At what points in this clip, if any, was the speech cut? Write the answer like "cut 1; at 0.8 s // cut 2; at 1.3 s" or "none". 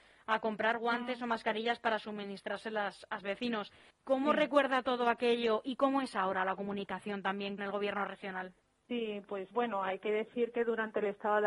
cut 1; at 3.2 s // cut 2; at 3.9 s // cut 3; at 7.6 s // cut 4; at 8.6 s // cut 5; at 9.5 s